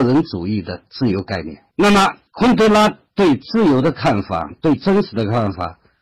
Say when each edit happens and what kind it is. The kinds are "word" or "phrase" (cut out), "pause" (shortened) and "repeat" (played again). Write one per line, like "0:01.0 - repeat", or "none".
0:01.7 - pause
0:02.3 - pause